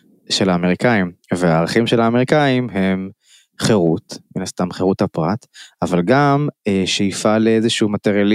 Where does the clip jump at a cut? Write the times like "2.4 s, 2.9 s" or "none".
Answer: none